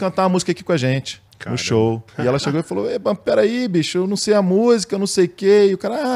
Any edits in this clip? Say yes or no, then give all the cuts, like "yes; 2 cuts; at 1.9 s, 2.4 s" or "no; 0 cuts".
yes; 2 cuts; at 1.3 s, 2.1 s